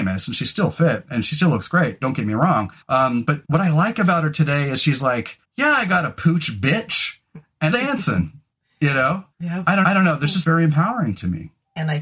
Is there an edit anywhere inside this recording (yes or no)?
yes